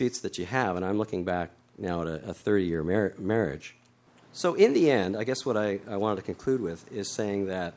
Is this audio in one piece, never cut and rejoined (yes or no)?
yes